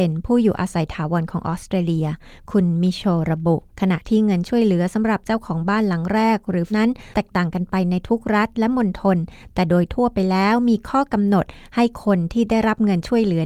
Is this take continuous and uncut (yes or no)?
no